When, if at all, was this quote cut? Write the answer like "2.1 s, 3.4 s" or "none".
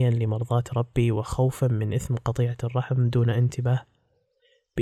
none